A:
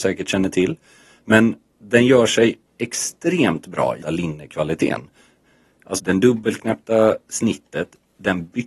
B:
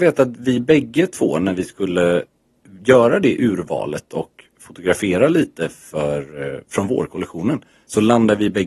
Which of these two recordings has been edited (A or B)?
A